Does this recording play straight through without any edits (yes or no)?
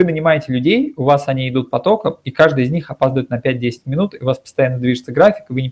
yes